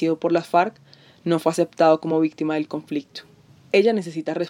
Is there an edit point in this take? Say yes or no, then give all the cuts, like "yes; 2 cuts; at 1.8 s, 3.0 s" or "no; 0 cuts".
no; 0 cuts